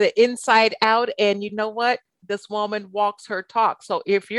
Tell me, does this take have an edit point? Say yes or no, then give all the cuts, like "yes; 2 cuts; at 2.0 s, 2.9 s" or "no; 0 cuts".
no; 0 cuts